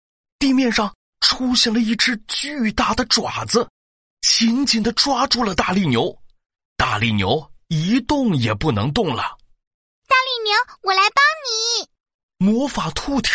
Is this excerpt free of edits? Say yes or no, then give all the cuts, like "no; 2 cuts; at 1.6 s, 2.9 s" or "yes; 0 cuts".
yes; 0 cuts